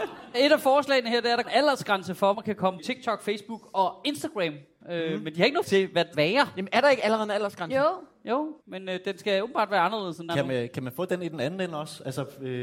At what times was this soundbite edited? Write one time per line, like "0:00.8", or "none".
0:01.4
0:02.3
0:02.8
0:05.6
0:06.1
0:08.6
0:10.3